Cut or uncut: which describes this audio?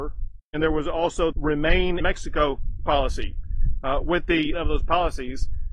cut